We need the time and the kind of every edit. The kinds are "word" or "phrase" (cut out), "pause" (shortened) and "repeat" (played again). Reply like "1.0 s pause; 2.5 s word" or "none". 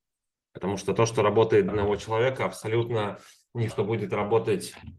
1.7 s word; 3.7 s word